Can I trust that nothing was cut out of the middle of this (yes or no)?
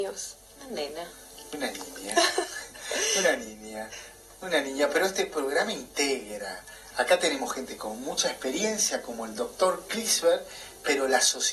yes